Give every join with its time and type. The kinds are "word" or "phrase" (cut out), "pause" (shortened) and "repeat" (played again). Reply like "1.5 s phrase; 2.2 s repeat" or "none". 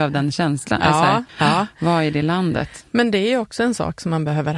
1.3 s pause